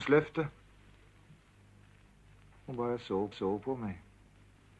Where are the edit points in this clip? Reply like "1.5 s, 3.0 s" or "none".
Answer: 3.3 s

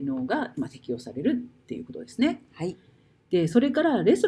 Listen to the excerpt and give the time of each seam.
none

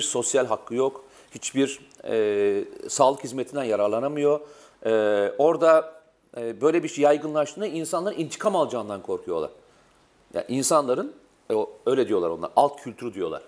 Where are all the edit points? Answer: none

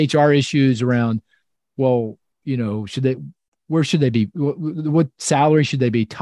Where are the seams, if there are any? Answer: none

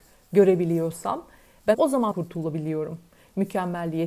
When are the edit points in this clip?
1.7 s, 2.1 s

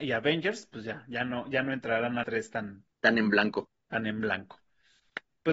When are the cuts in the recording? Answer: 2.2 s, 2.9 s

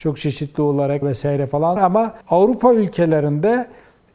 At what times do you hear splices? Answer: 1.0 s, 1.8 s, 2.2 s

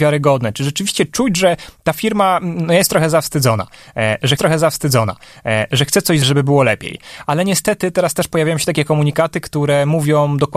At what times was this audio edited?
4.4 s, 6.2 s

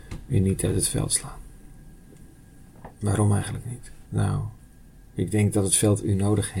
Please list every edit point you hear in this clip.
2.9 s, 4.1 s

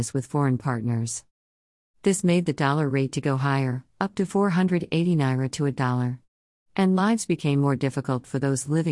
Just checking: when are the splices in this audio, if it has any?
none

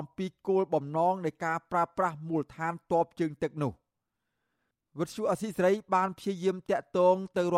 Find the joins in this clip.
none

